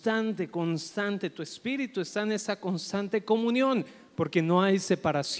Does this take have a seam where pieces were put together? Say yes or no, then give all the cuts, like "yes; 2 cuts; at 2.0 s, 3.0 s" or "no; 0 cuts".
no; 0 cuts